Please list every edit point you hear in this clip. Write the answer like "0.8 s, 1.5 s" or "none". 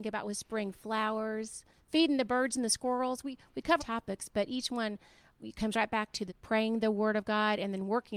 3.8 s, 6.3 s